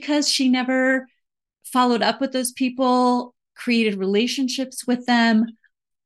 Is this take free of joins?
yes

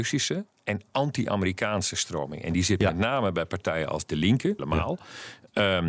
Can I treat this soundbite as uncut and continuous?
no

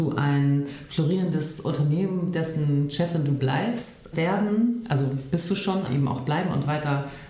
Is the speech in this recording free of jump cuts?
no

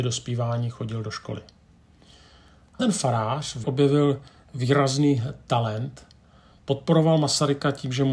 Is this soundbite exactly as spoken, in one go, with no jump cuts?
no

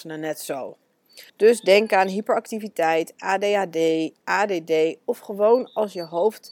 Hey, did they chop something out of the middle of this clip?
yes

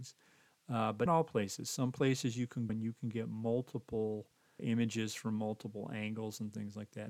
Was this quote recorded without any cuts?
no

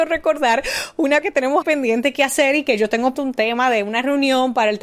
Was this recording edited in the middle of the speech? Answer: yes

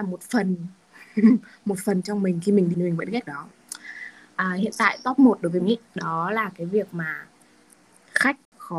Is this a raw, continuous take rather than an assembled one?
no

